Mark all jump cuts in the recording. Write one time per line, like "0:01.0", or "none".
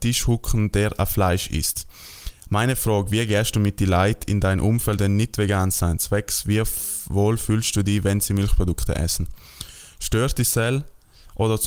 0:05.0